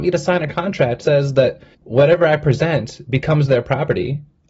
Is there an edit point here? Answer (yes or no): yes